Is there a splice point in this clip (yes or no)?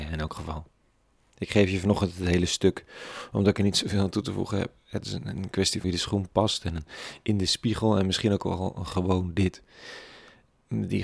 yes